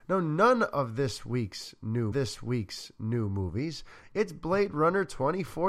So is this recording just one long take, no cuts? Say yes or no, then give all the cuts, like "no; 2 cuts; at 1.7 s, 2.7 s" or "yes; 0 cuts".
no; 1 cut; at 2.1 s